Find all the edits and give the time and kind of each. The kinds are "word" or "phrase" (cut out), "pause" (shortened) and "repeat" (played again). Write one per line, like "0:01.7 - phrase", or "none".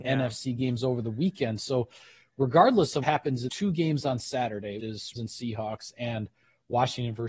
0:03.0 - word
0:03.5 - word
0:04.8 - word
0:05.2 - word